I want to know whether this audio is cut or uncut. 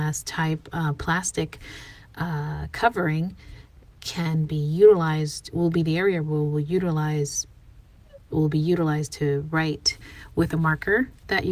uncut